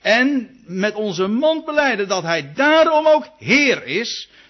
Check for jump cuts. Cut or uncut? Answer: uncut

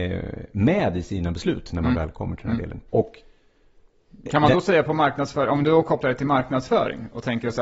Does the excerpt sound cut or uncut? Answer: cut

